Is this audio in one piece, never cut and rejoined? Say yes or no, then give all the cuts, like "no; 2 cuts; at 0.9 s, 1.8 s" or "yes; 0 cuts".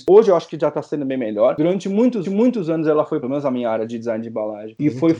no; 2 cuts; at 2.2 s, 3.2 s